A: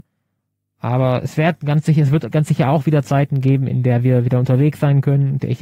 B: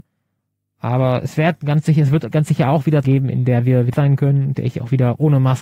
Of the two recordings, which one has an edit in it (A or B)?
B